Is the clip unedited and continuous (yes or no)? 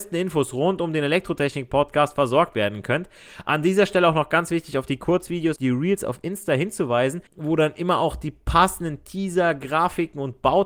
no